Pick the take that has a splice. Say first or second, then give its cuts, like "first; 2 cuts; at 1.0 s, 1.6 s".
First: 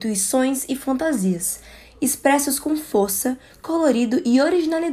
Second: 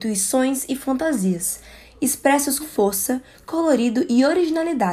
second; 1 cut; at 2.6 s